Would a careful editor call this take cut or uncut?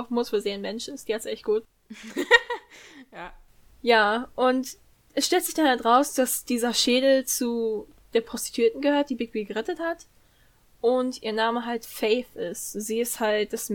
uncut